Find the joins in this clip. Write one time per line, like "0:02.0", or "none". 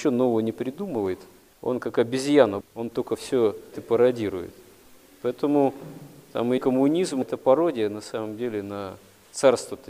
0:02.6
0:03.7
0:06.6
0:07.2